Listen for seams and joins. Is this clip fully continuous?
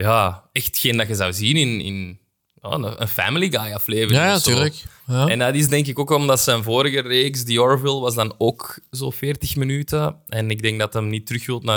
yes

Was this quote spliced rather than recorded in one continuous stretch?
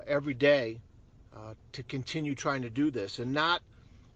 no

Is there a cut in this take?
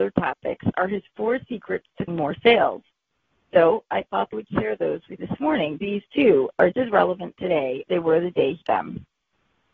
yes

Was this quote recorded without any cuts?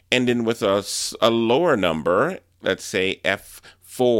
yes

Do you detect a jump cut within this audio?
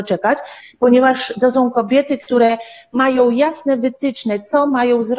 no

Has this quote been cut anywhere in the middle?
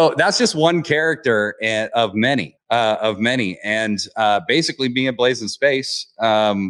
yes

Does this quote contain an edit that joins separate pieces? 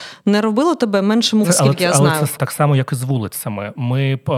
yes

